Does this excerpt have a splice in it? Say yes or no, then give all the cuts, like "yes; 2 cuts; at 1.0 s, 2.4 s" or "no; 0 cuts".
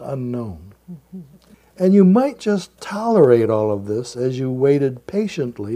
yes; 1 cut; at 1.5 s